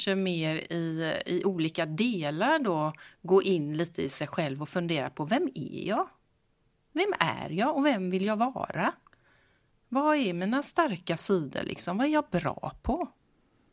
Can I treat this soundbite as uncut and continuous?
yes; 0 cuts

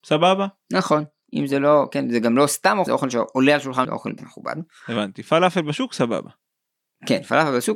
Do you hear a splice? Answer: yes; 3 cuts; at 2.9 s, 3.8 s, 4.2 s

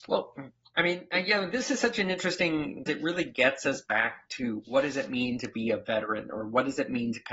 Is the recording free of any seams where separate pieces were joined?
no; 1 cut; at 2.9 s

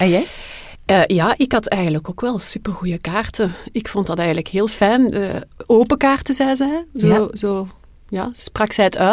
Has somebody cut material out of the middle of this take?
no; 0 cuts

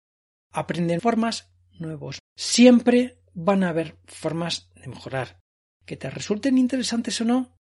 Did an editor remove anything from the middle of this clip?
yes; 2 cuts; at 1.0 s, 2.2 s

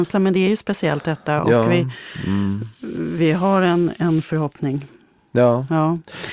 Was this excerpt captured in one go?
yes; 0 cuts

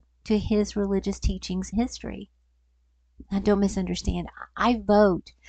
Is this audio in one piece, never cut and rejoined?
no; 1 cut; at 1.7 s

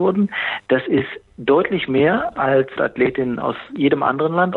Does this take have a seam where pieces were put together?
yes; 1 cut; at 2.8 s

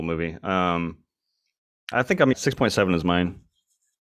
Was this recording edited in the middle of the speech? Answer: yes; 2 cuts; at 1.9 s, 2.3 s

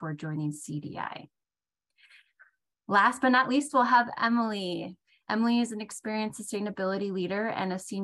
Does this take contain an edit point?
no; 0 cuts

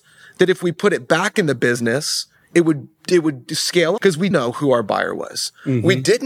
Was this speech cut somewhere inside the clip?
yes; 2 cuts; at 4.0 s, 4.3 s

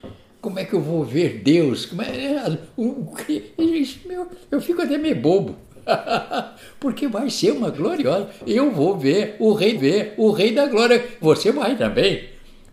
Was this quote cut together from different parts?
yes; 3 cuts; at 7.7 s, 9.7 s, 11.2 s

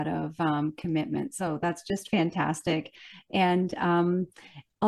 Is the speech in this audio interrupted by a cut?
no; 0 cuts

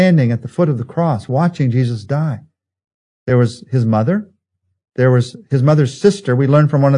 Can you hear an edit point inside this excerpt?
no; 0 cuts

